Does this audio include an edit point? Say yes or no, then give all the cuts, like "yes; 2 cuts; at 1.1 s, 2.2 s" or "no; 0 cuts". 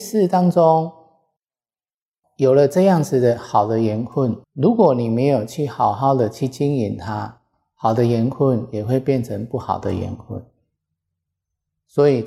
yes; 1 cut; at 4.4 s